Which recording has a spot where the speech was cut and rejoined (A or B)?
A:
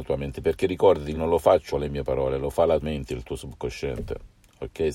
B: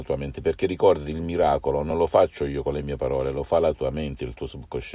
A